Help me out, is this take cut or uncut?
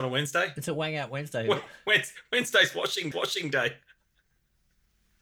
cut